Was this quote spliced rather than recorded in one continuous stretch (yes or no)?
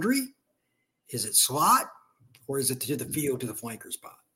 no